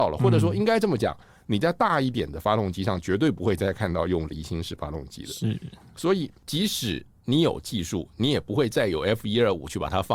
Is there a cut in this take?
no; 0 cuts

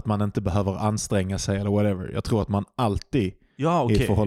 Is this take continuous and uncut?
yes; 0 cuts

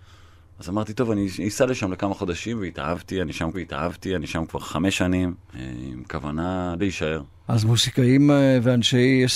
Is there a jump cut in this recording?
yes; 2 cuts; at 3.5 s, 6.8 s

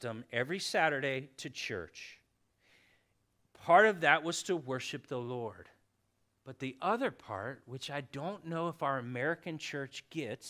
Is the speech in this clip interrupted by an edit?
no; 0 cuts

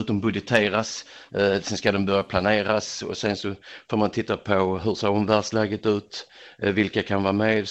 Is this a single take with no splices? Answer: yes; 0 cuts

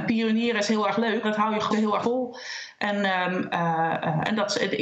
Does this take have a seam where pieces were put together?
yes; 3 cuts; at 1.2 s, 1.7 s, 2.0 s

